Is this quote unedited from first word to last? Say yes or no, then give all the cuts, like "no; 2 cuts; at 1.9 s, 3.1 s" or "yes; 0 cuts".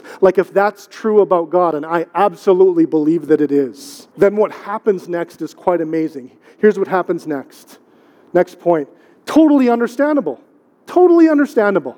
no; 1 cut; at 4.1 s